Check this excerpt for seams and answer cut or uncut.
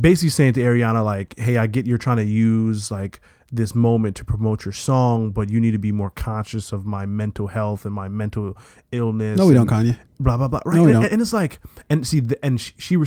uncut